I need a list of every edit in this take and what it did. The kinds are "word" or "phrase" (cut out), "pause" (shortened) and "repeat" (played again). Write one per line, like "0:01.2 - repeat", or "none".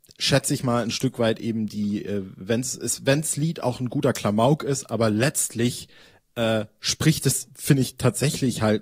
none